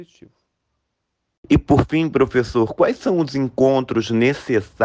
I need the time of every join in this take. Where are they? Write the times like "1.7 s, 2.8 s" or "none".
none